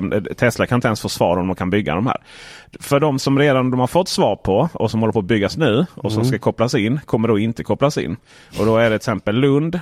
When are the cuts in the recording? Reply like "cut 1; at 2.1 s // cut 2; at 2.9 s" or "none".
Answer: none